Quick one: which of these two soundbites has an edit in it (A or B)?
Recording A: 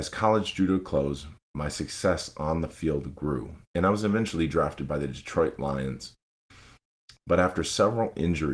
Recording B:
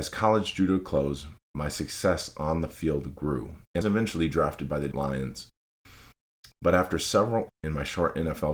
B